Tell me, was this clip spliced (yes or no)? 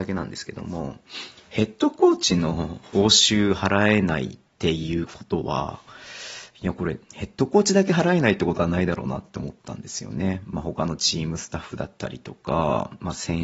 yes